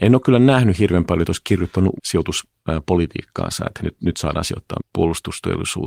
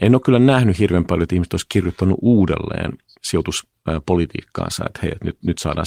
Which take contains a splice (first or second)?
first